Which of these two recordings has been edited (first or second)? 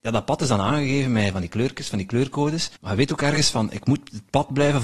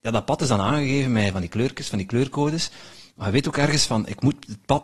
first